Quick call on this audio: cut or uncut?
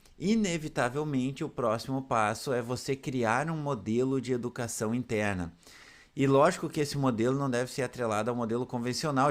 uncut